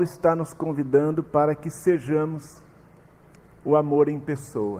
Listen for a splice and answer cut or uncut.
uncut